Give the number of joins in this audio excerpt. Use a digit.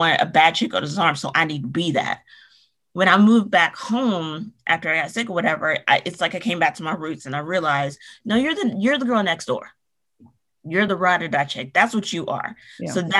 0